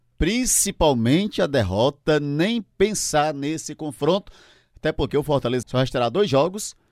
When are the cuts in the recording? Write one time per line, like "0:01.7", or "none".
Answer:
0:05.6